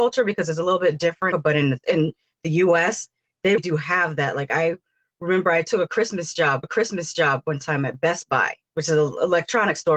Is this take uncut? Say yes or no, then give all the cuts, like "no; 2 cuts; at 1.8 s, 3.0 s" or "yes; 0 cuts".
no; 5 cuts; at 1.3 s, 1.8 s, 3.6 s, 6.6 s, 8.6 s